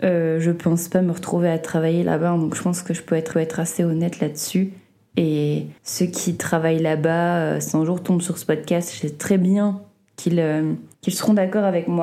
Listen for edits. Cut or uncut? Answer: cut